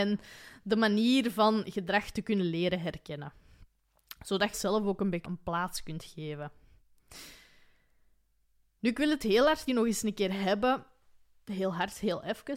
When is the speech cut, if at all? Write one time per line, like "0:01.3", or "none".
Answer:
0:04.5
0:05.2
0:09.7